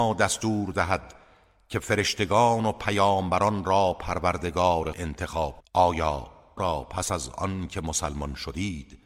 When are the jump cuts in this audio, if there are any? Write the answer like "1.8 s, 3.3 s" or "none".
4.9 s, 5.6 s, 6.6 s